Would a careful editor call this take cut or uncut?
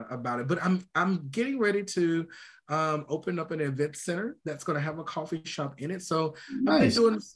uncut